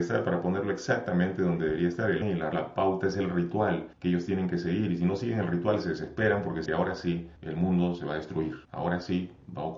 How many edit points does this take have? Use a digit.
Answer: 6